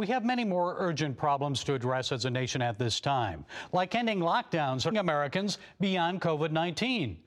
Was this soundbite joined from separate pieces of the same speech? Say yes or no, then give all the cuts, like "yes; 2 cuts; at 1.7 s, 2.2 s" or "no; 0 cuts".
yes; 1 cut; at 4.9 s